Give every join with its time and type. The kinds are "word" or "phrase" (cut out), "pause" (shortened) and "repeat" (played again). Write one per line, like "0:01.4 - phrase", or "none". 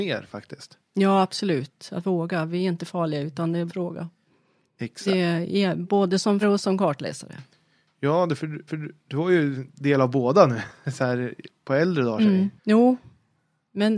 0:03.7 - phrase
0:06.4 - word
0:08.7 - repeat
0:12.6 - pause